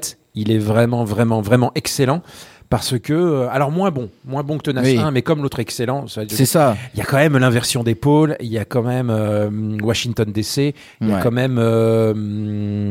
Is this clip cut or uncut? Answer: uncut